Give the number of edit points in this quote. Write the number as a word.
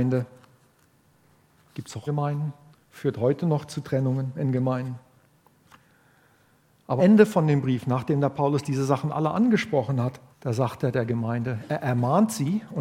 four